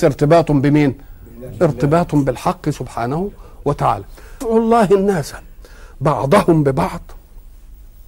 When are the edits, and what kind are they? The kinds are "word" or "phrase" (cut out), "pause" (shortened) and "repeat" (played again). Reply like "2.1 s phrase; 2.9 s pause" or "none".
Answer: 4.4 s word